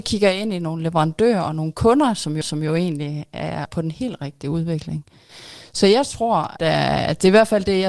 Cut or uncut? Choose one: cut